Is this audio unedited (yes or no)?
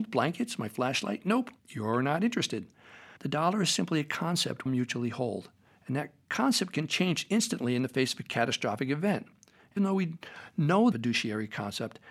no